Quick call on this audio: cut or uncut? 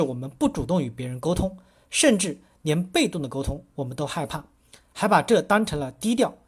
uncut